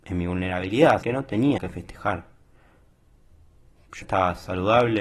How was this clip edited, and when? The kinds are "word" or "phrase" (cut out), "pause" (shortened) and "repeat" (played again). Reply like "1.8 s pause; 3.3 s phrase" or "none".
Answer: 1.0 s word; 1.6 s word; 4.0 s word